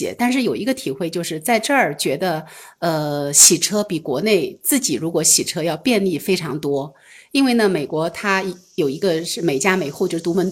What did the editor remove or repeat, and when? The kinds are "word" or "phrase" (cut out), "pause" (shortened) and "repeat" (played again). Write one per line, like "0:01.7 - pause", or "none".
none